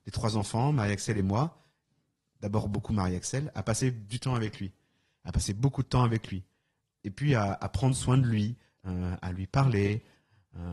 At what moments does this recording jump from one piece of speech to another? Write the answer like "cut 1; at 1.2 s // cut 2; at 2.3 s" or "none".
none